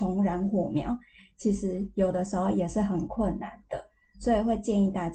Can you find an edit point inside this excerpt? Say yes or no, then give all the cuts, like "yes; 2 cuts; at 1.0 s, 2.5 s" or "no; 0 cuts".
no; 0 cuts